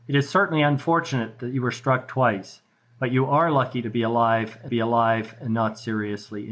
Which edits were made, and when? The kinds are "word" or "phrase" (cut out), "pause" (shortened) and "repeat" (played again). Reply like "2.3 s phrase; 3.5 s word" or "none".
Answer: 4.7 s repeat